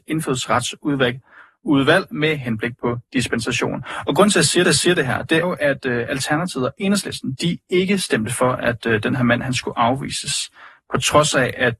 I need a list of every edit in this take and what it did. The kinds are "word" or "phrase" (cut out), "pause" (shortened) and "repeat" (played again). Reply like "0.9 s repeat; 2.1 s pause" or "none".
4.6 s repeat; 5.4 s word